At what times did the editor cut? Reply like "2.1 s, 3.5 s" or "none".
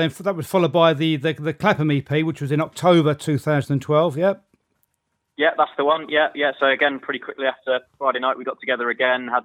none